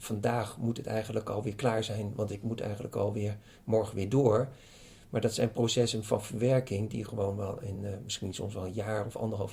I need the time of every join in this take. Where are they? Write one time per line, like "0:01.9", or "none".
none